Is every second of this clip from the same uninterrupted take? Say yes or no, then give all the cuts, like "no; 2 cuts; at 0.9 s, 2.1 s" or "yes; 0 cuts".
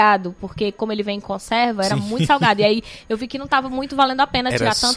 yes; 0 cuts